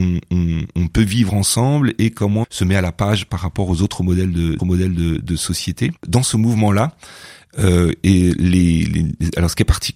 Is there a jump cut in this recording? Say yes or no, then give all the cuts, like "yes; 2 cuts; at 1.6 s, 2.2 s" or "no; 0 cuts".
yes; 3 cuts; at 2.4 s, 4.6 s, 6.0 s